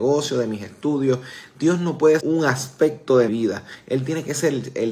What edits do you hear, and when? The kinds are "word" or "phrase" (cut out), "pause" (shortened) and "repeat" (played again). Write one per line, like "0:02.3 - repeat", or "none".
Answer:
0:02.2 - word
0:03.3 - word

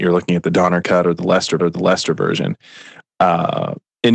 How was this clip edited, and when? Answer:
0:01.6 - repeat

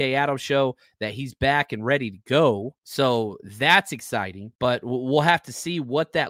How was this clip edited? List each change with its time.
0:02.8 - pause
0:04.6 - pause

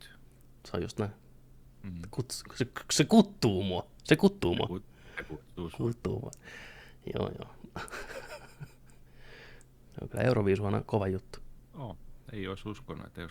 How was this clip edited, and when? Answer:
none

